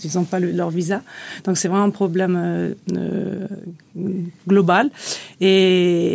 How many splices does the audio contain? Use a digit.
0